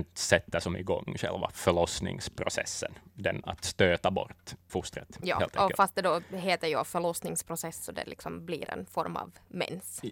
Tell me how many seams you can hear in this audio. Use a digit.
2